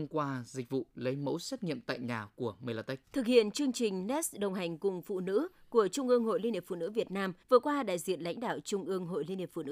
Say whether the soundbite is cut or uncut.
cut